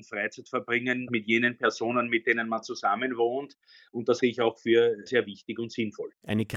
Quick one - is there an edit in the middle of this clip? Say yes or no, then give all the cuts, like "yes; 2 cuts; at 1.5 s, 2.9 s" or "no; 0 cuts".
yes; 3 cuts; at 1.1 s, 4.2 s, 5.1 s